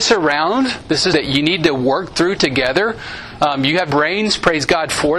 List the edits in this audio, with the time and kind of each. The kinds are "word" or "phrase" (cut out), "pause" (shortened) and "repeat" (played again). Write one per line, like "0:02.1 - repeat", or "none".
0:01.1 - word
0:03.9 - word